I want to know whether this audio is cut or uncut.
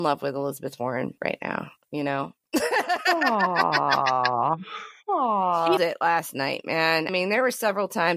cut